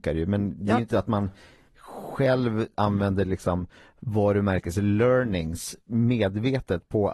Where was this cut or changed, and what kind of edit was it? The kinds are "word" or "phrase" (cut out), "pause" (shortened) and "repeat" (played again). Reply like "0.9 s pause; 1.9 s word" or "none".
none